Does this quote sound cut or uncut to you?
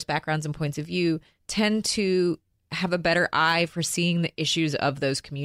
uncut